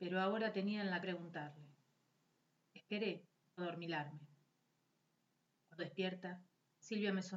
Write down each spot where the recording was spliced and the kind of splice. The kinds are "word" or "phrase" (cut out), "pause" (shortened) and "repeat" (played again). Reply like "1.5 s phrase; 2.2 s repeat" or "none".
1.0 s phrase; 3.6 s word; 5.8 s word